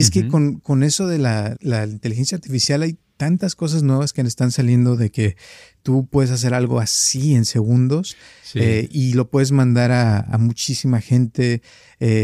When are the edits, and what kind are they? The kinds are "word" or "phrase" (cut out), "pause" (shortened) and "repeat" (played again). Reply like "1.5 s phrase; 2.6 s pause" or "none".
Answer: 1.5 s word